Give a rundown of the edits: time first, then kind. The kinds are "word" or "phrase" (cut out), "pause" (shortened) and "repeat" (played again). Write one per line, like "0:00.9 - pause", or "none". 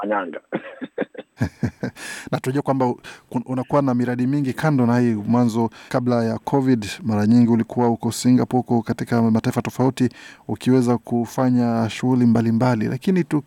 0:01.3 - pause
0:05.9 - pause